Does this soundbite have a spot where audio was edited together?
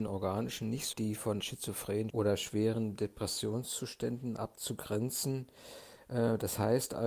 yes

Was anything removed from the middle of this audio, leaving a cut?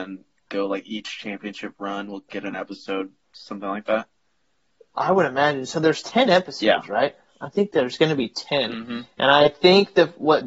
no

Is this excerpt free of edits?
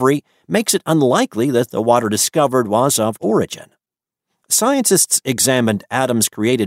no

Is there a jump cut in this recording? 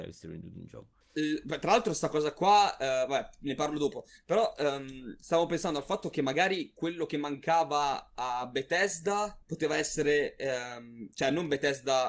yes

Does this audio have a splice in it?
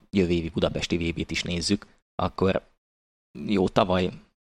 no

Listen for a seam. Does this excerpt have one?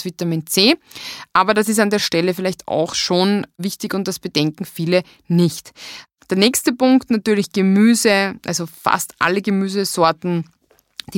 no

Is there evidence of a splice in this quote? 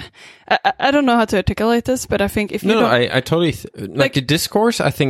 no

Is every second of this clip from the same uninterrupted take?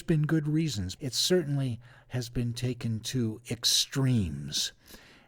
no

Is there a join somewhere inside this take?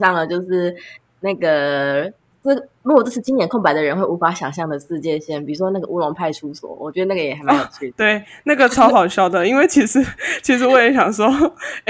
no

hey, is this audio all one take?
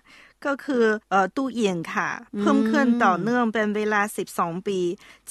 no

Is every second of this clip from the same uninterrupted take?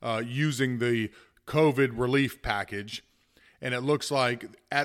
yes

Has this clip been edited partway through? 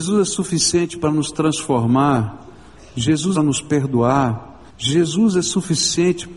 yes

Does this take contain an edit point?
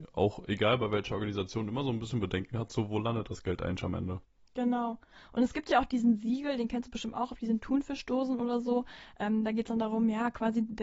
no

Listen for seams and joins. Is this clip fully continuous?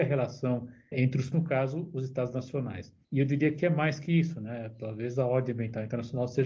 no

